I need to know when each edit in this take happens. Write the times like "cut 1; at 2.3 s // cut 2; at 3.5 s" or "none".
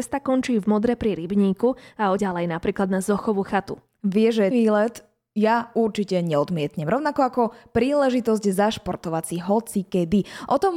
cut 1; at 2.2 s // cut 2; at 4.5 s